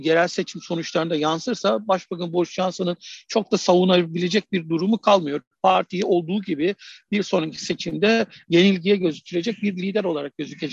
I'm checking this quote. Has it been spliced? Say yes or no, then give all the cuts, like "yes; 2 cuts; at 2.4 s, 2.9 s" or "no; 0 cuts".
no; 0 cuts